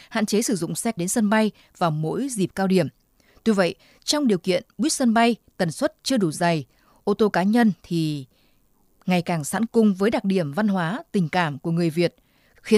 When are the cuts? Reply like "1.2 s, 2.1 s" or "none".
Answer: 1.0 s, 9.7 s